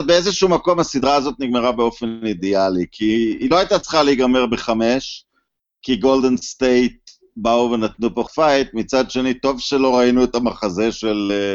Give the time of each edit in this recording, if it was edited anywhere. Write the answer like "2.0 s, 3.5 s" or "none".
8.3 s